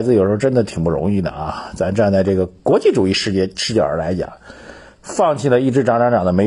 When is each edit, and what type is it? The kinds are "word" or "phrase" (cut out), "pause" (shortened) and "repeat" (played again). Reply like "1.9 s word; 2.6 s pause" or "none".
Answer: none